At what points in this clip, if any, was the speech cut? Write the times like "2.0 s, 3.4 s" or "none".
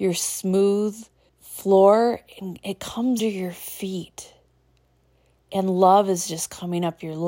1.3 s, 3.2 s